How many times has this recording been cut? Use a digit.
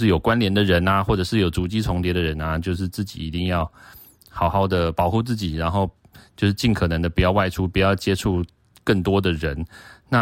0